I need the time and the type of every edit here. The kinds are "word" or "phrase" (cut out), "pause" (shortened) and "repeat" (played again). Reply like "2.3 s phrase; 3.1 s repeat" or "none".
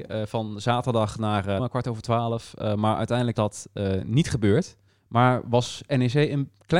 1.6 s phrase; 3.3 s word; 4.9 s pause